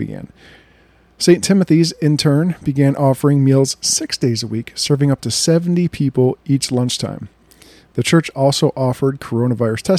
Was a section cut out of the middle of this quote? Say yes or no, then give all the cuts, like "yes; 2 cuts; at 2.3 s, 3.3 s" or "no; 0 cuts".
no; 0 cuts